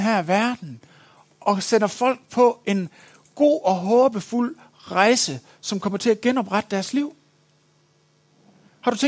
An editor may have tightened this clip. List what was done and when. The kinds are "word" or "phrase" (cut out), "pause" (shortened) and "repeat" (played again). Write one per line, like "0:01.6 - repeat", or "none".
none